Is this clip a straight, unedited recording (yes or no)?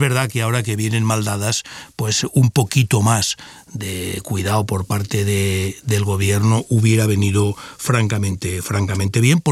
yes